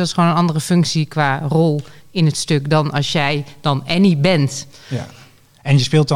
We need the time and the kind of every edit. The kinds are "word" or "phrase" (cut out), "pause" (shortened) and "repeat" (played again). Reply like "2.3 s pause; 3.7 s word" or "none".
none